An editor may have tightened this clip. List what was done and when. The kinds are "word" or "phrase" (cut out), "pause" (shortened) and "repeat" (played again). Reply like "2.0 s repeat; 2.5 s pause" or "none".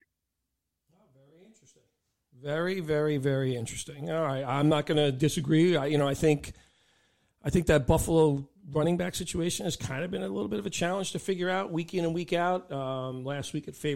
none